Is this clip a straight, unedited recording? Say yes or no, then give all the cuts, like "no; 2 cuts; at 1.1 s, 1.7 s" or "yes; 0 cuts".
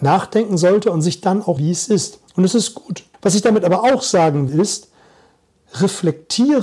no; 3 cuts; at 1.6 s, 3.1 s, 4.5 s